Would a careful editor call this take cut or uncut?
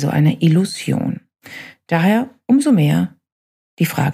uncut